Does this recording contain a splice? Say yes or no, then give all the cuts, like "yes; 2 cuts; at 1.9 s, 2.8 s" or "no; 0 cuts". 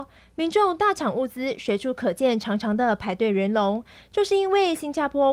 no; 0 cuts